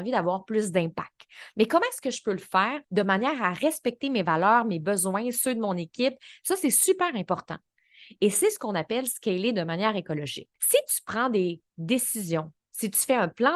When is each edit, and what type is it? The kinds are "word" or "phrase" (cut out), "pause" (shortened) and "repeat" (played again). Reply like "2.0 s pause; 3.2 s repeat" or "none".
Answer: 2.8 s pause; 10.6 s pause

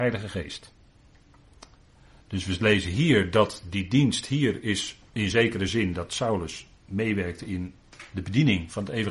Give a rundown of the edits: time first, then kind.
none

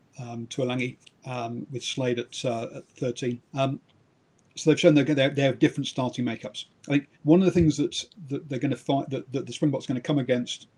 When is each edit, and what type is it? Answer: 1.0 s pause; 3.5 s pause; 7.2 s pause

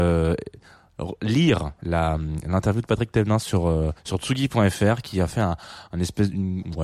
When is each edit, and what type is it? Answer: 4.0 s pause

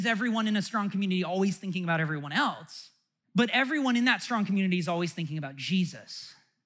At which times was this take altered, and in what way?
3.2 s pause

